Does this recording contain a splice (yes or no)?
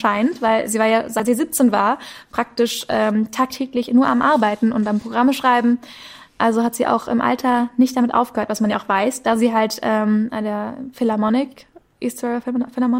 no